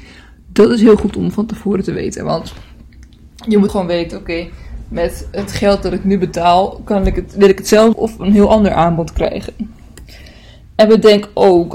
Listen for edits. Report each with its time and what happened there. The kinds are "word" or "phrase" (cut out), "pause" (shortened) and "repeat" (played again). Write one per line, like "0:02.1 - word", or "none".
0:03.7 - word
0:07.9 - word